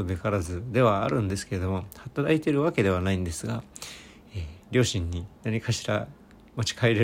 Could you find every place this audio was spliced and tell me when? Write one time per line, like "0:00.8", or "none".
0:05.4